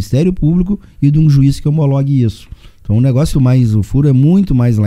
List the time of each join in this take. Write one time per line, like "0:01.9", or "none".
0:03.3

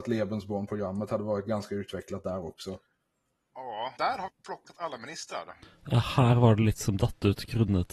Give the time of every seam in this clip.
0:04.0
0:04.3

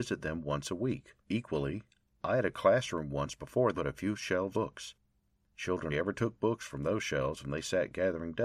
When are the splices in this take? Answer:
0:01.2
0:03.7
0:04.5
0:05.9

